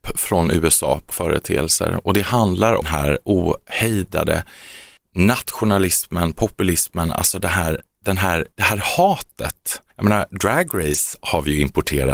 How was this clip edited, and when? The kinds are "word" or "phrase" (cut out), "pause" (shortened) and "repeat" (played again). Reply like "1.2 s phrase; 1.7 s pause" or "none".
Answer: 1.1 s word; 2.8 s phrase; 5.0 s pause; 8.5 s pause; 9.9 s pause